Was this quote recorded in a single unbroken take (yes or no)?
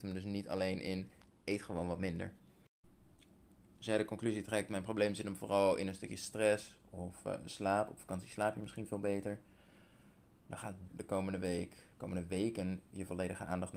no